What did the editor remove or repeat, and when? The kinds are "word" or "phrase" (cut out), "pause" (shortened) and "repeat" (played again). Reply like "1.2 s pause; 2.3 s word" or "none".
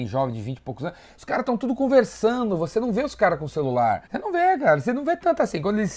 4.1 s pause